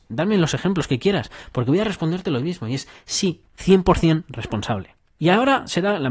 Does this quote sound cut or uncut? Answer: cut